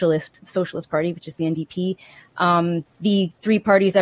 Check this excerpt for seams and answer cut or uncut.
cut